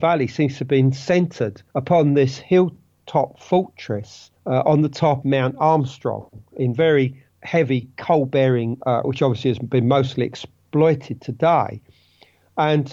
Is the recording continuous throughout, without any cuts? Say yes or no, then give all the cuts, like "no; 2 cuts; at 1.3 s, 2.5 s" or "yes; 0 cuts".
no; 5 cuts; at 1.7 s, 4.4 s, 5.2 s, 7.3 s, 9.0 s